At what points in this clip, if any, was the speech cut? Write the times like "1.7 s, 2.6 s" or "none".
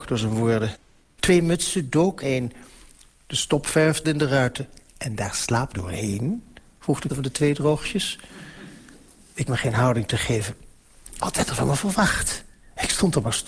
1.2 s, 2.2 s, 4.0 s, 5.7 s, 7.1 s, 9.5 s